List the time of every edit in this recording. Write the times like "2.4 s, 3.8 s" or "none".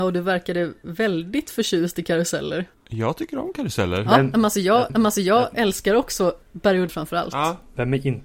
2.7 s, 4.9 s, 6.4 s, 6.9 s